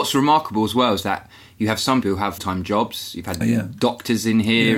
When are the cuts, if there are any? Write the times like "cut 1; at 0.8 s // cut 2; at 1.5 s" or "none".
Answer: cut 1; at 2.0 s // cut 2; at 2.4 s // cut 3; at 3.4 s